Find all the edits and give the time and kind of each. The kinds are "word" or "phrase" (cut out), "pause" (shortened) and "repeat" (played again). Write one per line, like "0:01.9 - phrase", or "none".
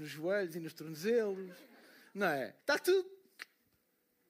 0:02.6 - pause